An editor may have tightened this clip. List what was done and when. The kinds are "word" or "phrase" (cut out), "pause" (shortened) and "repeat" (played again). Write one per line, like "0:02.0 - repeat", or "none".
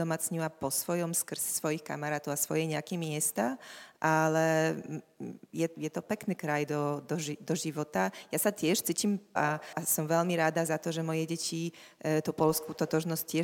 0:05.7 - word
0:09.4 - word